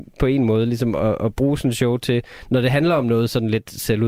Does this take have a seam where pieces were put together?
no; 0 cuts

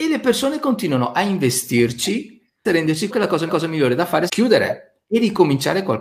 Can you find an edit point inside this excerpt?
yes; 4 cuts; at 2.7 s, 3.1 s, 3.5 s, 4.3 s

